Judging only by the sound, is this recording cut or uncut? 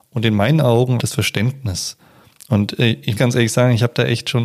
cut